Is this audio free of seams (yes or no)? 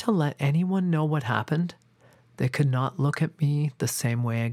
yes